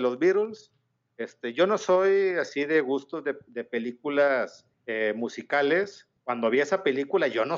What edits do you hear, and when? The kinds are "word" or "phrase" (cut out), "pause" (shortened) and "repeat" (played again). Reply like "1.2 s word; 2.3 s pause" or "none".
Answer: 4.7 s pause; 6.2 s pause